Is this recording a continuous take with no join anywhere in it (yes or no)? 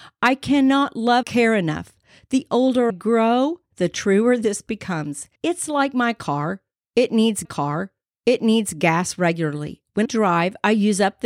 no